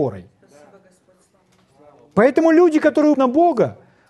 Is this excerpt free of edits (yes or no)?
no